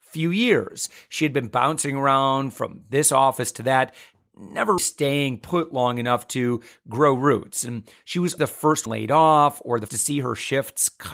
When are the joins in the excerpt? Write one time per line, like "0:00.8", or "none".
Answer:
0:04.8
0:08.4
0:08.9
0:09.9